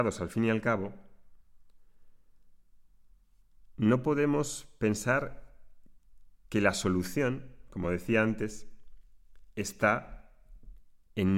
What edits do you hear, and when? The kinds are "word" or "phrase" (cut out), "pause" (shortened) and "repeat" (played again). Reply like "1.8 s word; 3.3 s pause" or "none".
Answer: none